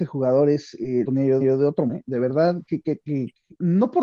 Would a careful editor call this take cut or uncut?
cut